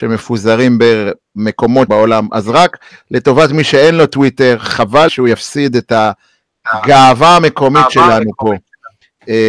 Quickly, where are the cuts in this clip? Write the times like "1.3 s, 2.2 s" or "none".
1.9 s, 5.1 s

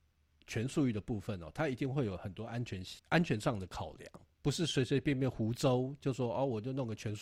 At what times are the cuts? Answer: 3.0 s, 4.3 s

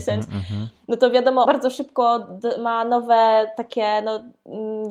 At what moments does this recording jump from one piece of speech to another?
1.4 s

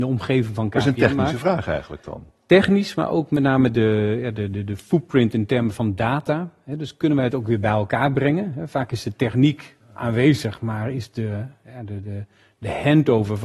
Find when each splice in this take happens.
none

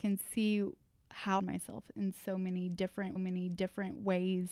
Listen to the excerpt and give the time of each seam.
1.4 s, 3.2 s

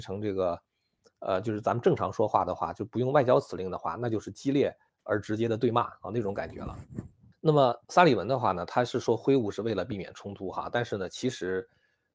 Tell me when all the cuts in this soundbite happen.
4.9 s, 7.3 s, 7.8 s

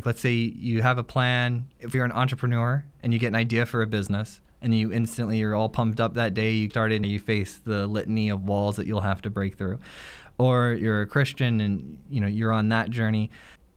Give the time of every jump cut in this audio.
1.9 s, 6.7 s, 7.0 s

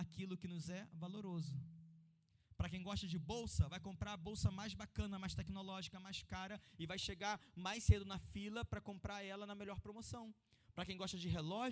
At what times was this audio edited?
none

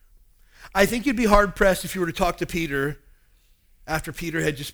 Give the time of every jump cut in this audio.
none

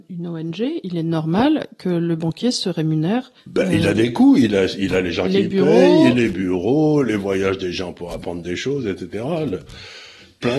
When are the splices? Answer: 3.4 s

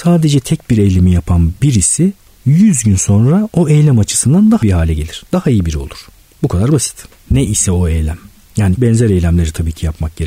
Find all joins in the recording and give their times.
4.6 s, 8.8 s

